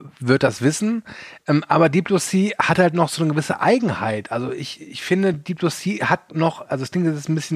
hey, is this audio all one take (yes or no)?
yes